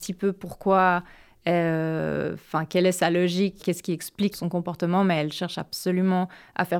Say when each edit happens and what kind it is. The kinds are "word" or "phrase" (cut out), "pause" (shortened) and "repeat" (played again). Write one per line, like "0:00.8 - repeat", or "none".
0:03.6 - word
0:04.3 - word

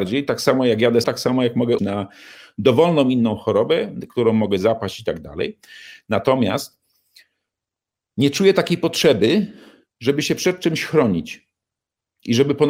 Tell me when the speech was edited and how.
0:01.0 - word
0:01.8 - word

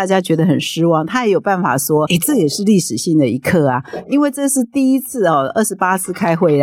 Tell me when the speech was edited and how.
0:02.1 - word

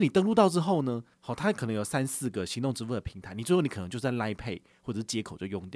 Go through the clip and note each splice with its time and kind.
0:01.1 - pause

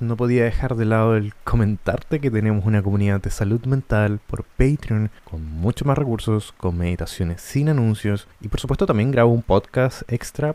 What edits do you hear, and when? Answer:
0:05.2 - pause
0:08.3 - pause

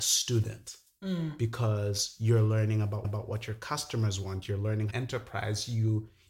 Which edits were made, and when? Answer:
0:03.0 - repeat
0:04.9 - phrase

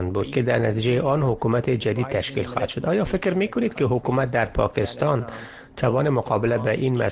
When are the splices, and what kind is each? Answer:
none

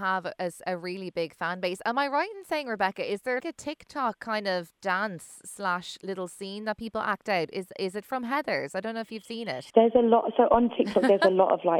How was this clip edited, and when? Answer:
0:03.4 - word
0:09.7 - pause

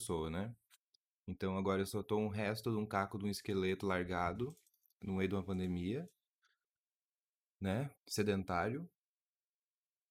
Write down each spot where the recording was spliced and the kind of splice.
0:08.0 - pause

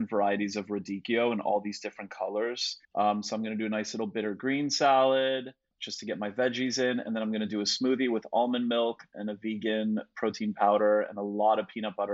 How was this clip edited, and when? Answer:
0:02.8 - pause

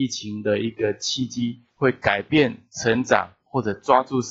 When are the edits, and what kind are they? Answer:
0:01.7 - pause

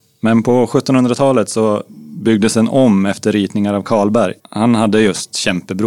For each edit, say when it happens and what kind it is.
0:04.4 - pause

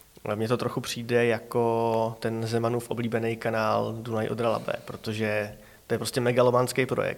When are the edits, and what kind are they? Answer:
none

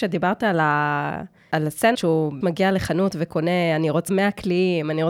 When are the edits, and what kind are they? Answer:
0:01.9 - word
0:02.4 - word
0:04.1 - word

